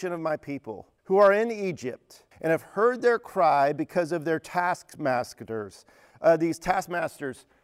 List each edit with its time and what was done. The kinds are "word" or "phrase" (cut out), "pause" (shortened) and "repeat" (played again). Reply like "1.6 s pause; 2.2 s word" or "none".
1.0 s pause; 2.3 s pause